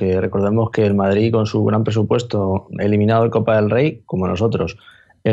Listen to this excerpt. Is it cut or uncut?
uncut